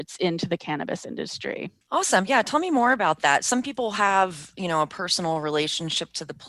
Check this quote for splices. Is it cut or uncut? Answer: cut